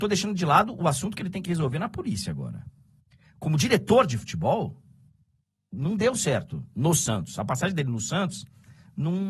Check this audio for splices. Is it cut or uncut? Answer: uncut